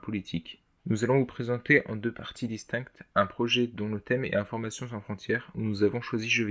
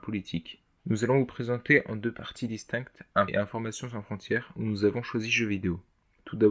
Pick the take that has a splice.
second; 1 cut; at 3.3 s

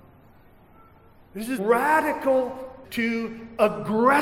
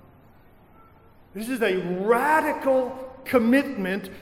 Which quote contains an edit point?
first; 2 cuts; at 1.6 s, 2.8 s

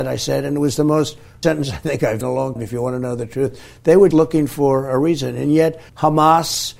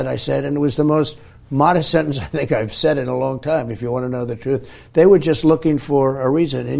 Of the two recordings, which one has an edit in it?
first; 5 cuts; at 1.4 s, 2.2 s, 2.6 s, 4.1 s, 5.9 s

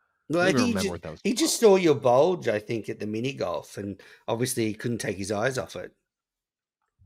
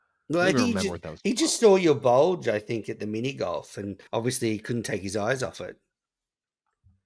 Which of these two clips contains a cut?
second; 1 cut; at 4.1 s

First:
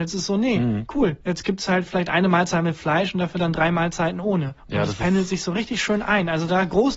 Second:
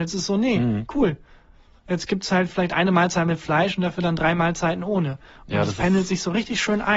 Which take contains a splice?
first; 2 cuts; at 1.2 s, 4.6 s

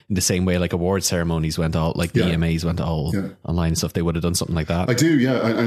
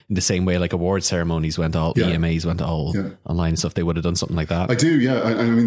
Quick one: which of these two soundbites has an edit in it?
second; 1 cut; at 1.9 s

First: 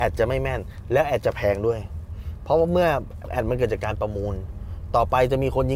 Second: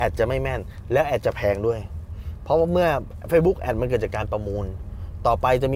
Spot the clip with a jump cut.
first; 1 cut; at 3.2 s

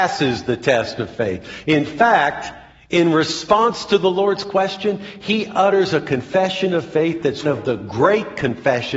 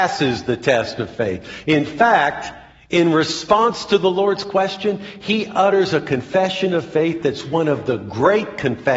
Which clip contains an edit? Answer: first; 1 cut; at 7.4 s

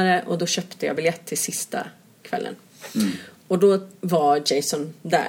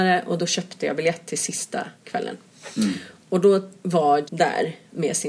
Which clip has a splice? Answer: second; 2 cuts; at 1.9 s, 4.2 s

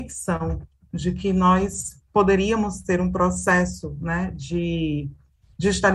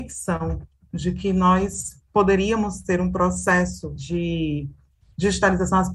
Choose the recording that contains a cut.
second; 1 cut; at 4.0 s

